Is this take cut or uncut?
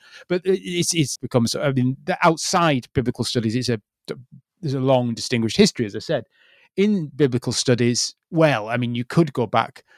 cut